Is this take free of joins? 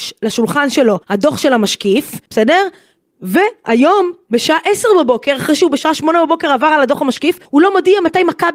no; 3 cuts; at 1.0 s, 2.3 s, 7.5 s

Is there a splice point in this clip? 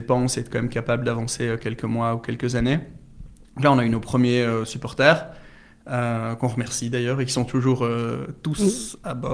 no; 0 cuts

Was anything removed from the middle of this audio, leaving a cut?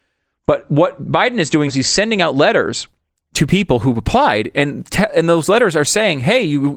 yes; 1 cut; at 1.7 s

